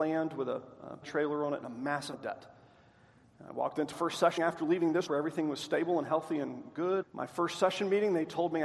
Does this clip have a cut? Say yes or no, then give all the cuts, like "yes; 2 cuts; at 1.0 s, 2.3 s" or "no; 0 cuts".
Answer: yes; 6 cuts; at 1.0 s, 2.1 s, 3.9 s, 4.4 s, 5.1 s, 7.0 s